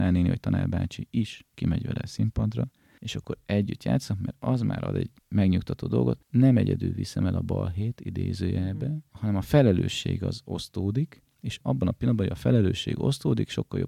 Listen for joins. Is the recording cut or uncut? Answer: uncut